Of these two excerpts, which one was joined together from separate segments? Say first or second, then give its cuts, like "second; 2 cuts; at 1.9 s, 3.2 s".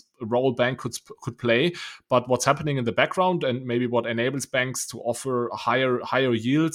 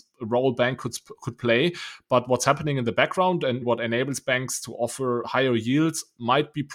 second; 2 cuts; at 3.6 s, 5.2 s